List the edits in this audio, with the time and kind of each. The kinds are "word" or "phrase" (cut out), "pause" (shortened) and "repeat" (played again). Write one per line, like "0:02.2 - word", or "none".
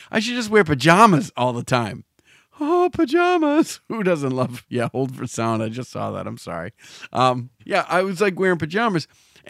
0:07.6 - pause